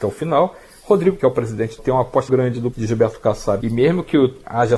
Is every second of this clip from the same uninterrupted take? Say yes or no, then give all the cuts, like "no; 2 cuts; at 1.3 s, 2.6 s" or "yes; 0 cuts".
no; 5 cuts; at 1.2 s, 1.8 s, 2.3 s, 2.7 s, 3.6 s